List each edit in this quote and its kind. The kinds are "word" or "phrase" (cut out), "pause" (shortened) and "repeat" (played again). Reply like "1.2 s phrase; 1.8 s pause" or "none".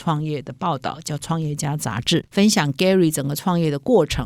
2.3 s pause